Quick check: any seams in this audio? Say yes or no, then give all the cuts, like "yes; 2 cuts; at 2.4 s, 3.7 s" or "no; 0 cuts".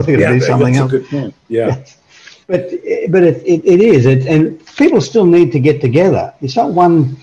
no; 0 cuts